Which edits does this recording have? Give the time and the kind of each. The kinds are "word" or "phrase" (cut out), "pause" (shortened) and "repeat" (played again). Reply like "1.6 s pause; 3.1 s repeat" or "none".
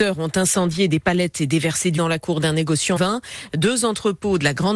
2.0 s word; 3.0 s word